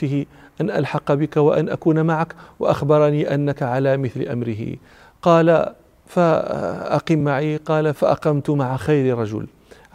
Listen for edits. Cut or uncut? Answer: uncut